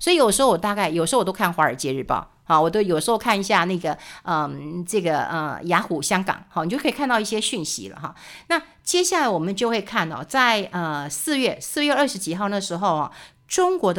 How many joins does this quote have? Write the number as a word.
zero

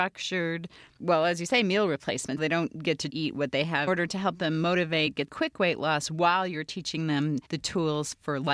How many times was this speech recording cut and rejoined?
five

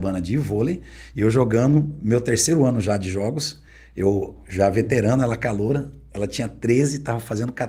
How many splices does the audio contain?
zero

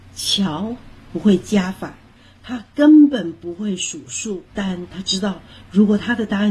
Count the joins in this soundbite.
one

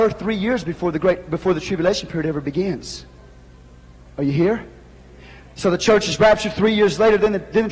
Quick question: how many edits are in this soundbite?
zero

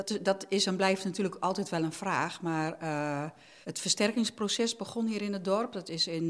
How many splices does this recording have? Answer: one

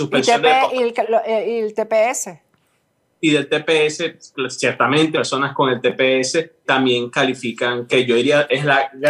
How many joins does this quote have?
three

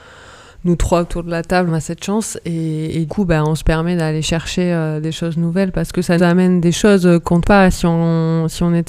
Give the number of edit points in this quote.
four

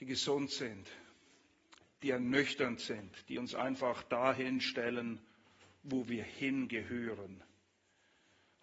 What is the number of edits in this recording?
zero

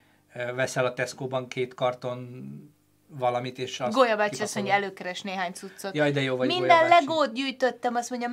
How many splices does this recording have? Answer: zero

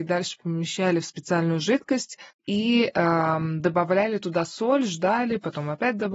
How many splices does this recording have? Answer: zero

